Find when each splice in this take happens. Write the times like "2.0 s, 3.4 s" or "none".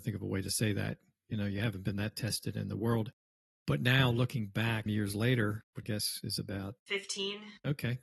4.9 s, 5.8 s